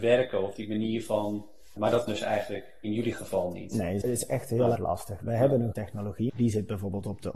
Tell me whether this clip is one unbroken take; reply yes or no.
no